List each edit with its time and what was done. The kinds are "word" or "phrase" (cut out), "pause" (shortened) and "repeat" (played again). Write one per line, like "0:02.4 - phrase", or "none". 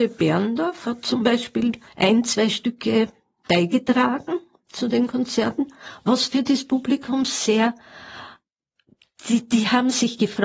0:01.9 - pause